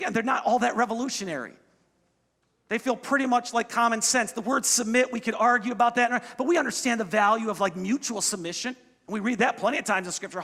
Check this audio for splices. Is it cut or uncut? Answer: uncut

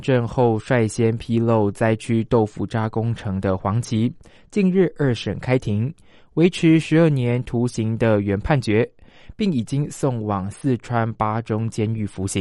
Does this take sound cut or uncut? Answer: uncut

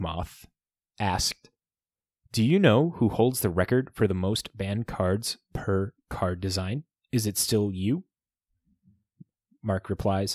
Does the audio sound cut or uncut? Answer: uncut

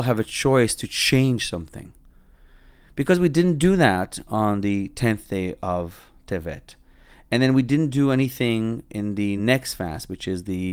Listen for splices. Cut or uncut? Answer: uncut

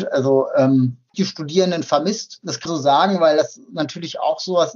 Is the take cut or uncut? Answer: cut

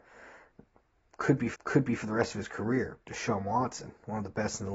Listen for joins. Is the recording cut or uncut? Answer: cut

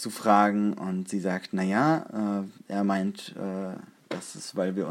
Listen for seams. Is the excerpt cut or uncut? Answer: cut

